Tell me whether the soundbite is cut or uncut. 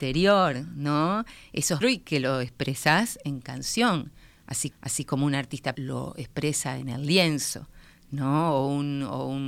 cut